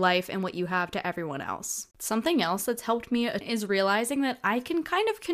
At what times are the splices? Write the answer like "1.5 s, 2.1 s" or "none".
1.9 s, 3.4 s